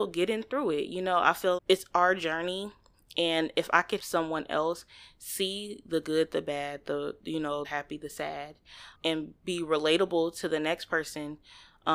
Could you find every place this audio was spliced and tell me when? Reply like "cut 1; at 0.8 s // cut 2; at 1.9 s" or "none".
cut 1; at 1.6 s // cut 2; at 4.0 s // cut 3; at 7.6 s // cut 4; at 8.9 s